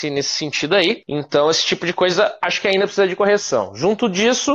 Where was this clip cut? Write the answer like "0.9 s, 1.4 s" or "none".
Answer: none

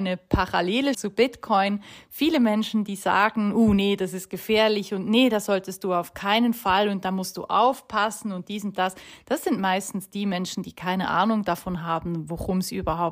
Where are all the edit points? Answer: 0.9 s

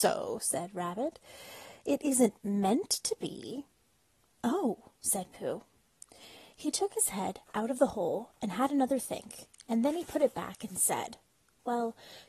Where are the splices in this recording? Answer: none

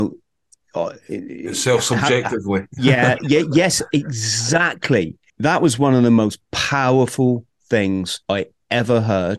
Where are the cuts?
5.3 s, 8.2 s

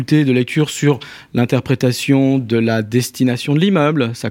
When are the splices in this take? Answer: none

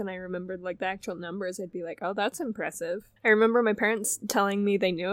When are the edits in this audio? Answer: 3.2 s

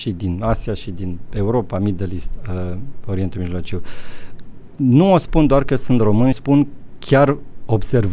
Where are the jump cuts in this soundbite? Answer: 6.3 s

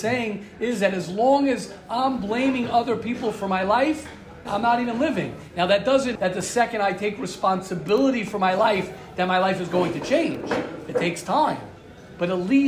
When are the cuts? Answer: 4.5 s, 6.2 s

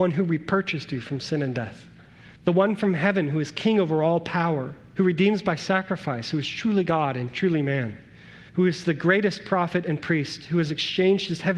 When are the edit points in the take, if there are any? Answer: 2.4 s, 8.5 s

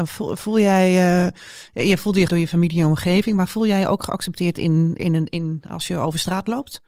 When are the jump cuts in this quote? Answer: 2.3 s, 5.0 s

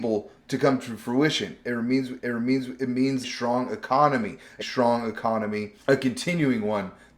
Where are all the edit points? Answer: 2.2 s, 3.2 s, 4.6 s, 5.8 s

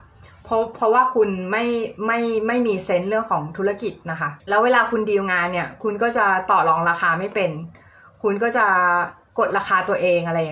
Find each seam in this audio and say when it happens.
4.4 s

